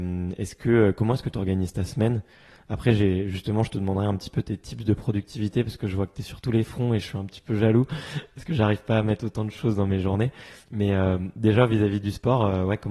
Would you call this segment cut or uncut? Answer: uncut